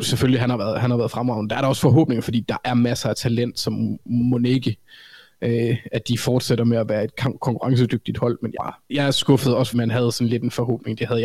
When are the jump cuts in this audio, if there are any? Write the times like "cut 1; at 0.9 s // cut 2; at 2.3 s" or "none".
cut 1; at 8.6 s // cut 2; at 8.9 s // cut 3; at 9.7 s